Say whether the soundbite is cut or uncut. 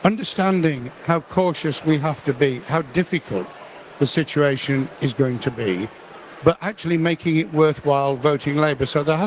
uncut